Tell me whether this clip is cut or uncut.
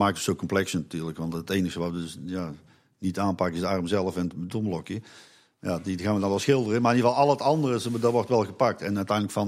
uncut